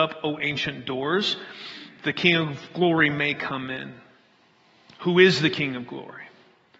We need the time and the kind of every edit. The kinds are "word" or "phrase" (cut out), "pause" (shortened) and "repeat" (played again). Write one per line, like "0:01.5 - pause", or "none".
none